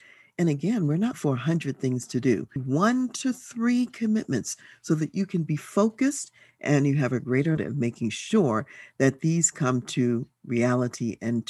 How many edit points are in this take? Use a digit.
3